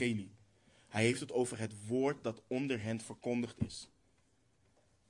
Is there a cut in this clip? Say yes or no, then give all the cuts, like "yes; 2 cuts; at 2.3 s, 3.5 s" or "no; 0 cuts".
no; 0 cuts